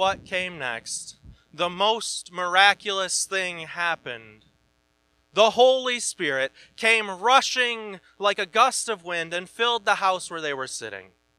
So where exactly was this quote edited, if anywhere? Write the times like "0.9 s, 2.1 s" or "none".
none